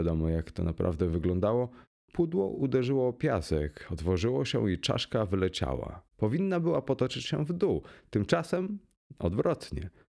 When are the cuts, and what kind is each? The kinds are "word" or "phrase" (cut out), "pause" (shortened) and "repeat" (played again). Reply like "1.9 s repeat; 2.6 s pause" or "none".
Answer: 6.1 s pause